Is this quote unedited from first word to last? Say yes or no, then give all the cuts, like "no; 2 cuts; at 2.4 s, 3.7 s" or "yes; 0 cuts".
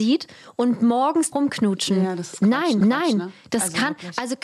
no; 2 cuts; at 1.3 s, 2.8 s